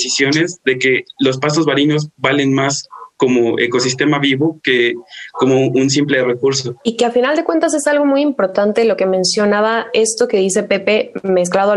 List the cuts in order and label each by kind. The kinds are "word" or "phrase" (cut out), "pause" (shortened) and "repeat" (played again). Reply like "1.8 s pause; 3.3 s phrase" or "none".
6.8 s pause